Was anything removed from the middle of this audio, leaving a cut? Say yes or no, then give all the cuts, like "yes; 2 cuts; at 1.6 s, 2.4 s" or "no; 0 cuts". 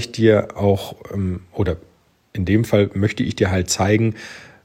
no; 0 cuts